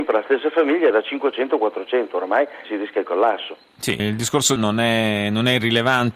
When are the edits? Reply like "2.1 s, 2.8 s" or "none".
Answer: 0.9 s, 2.6 s, 4.0 s, 4.6 s